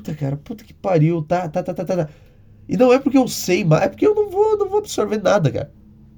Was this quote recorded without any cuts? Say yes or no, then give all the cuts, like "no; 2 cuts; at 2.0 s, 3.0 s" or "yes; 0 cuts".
yes; 0 cuts